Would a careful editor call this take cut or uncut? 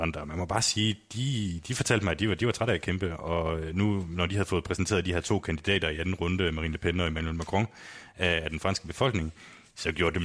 uncut